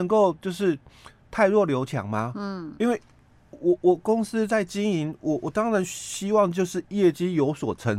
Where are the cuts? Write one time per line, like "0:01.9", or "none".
none